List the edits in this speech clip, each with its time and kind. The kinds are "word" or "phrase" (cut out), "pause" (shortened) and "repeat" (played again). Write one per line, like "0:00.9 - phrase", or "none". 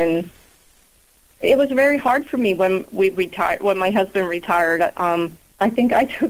none